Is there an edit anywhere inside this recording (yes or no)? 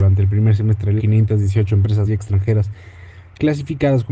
yes